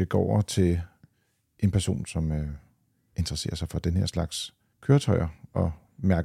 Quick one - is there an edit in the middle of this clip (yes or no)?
no